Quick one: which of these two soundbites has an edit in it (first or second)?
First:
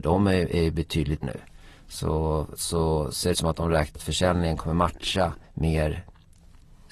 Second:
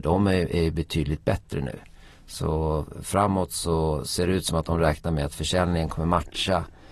first